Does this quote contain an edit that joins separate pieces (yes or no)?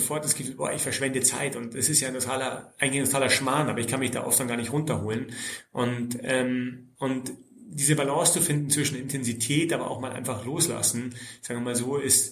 yes